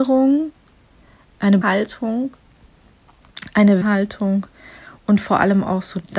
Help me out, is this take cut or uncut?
cut